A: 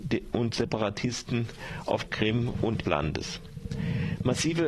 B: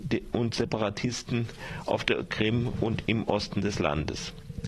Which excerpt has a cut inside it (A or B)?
A